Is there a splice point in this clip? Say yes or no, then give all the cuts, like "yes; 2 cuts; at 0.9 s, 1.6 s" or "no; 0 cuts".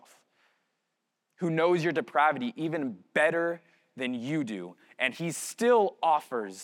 no; 0 cuts